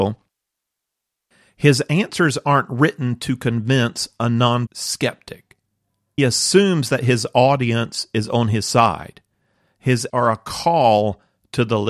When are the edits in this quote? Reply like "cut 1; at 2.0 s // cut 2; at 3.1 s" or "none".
cut 1; at 4.7 s // cut 2; at 6.2 s // cut 3; at 10.1 s